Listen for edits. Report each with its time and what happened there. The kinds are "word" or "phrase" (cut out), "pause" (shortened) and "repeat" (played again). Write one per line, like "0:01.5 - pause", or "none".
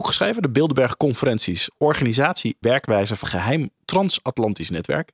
0:02.6 - word
0:03.2 - word